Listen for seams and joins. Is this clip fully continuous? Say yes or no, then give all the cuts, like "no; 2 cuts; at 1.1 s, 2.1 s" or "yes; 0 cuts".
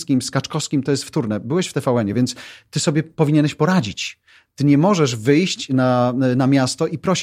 yes; 0 cuts